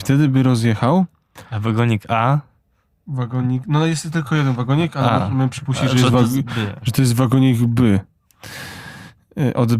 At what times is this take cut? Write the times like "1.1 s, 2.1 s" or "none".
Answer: none